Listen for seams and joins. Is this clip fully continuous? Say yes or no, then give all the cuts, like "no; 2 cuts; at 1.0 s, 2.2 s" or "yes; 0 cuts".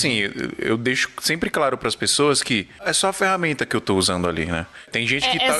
yes; 0 cuts